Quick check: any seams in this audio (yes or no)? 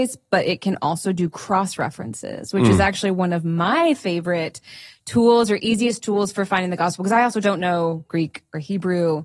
no